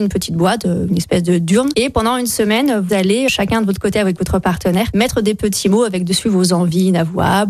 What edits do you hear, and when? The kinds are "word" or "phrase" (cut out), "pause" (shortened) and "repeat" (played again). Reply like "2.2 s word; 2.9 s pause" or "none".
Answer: 2.9 s word